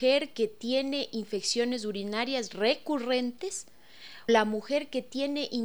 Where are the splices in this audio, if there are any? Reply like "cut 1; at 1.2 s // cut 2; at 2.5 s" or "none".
cut 1; at 4.3 s